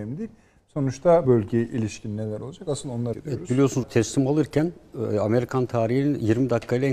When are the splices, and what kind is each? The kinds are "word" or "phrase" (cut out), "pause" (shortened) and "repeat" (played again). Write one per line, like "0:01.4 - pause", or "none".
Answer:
0:01.2 - word
0:03.1 - word
0:03.8 - word